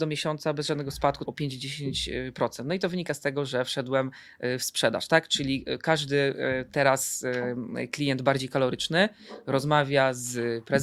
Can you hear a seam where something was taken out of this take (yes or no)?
yes